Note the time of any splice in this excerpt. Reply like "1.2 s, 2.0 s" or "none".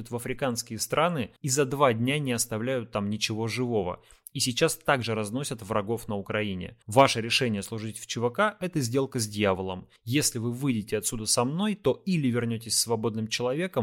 1.4 s, 6.8 s, 10.0 s